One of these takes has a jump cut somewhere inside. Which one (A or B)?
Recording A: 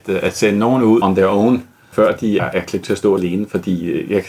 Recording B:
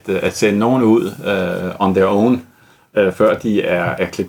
A